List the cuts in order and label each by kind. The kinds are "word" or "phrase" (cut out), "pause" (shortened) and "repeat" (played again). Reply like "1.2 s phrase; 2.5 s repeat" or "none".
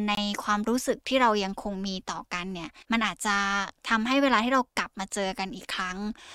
2.8 s pause